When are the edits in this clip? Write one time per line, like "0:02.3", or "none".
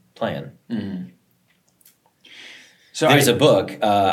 none